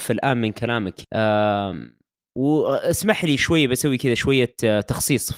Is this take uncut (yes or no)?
no